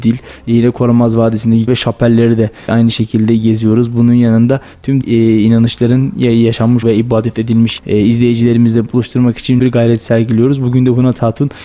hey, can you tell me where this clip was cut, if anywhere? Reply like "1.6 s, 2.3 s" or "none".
1.7 s, 2.7 s, 5.0 s, 6.8 s, 7.8 s, 9.6 s